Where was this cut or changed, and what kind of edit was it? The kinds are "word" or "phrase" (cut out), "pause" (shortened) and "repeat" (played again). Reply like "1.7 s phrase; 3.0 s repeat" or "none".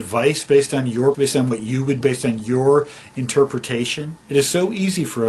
1.1 s word; 2.0 s word; 4.2 s pause